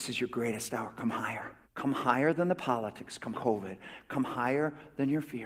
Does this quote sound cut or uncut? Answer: cut